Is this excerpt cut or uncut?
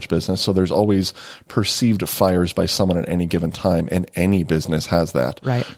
uncut